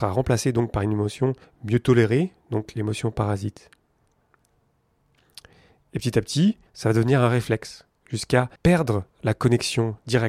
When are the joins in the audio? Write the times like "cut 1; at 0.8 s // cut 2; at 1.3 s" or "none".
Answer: cut 1; at 1.4 s // cut 2; at 6.7 s // cut 3; at 8.6 s

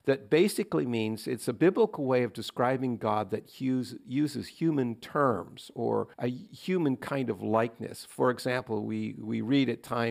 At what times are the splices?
cut 1; at 6.1 s

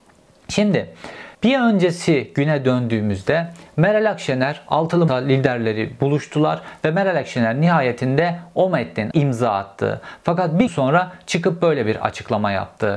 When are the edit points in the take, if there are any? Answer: cut 1; at 1.3 s // cut 2; at 5.1 s // cut 3; at 9.1 s // cut 4; at 10.7 s

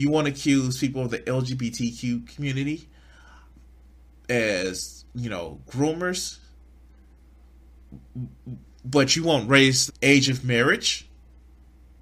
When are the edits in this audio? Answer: cut 1; at 9.9 s

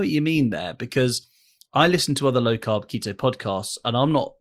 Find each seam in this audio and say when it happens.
none

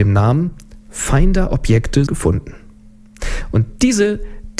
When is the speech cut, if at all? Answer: cut 1; at 2.1 s

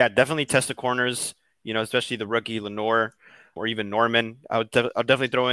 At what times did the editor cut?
cut 1; at 3.6 s

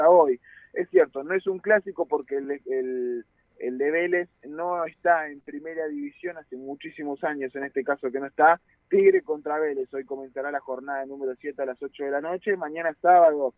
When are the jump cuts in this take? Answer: none

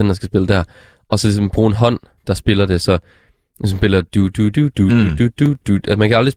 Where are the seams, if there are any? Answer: cut 1; at 4.5 s

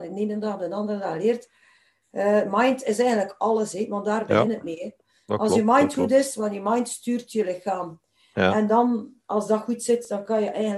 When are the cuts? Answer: none

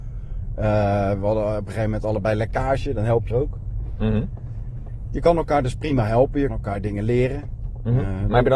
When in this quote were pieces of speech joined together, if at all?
cut 1; at 3.3 s // cut 2; at 6.5 s

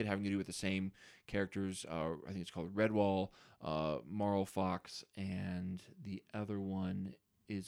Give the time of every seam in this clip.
none

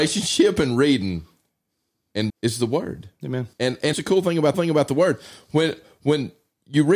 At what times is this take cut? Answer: cut 1; at 2.3 s // cut 2; at 3.5 s // cut 3; at 3.9 s // cut 4; at 4.5 s

